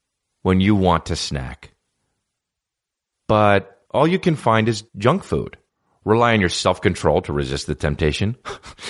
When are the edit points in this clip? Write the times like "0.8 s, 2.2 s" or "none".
3.8 s, 4.9 s, 5.7 s